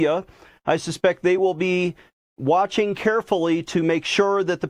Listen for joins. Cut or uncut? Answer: uncut